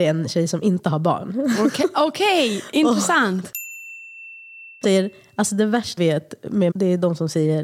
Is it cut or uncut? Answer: cut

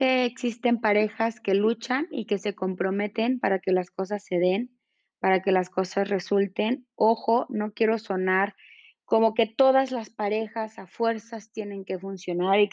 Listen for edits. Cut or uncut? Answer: uncut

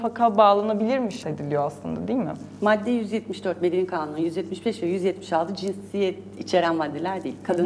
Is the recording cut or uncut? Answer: cut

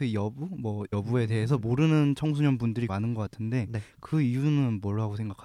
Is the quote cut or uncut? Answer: cut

